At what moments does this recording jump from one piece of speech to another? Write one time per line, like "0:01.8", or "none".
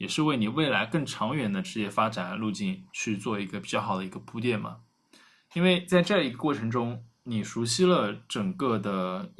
0:02.9